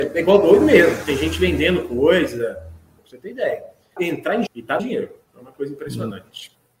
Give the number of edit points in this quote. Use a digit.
4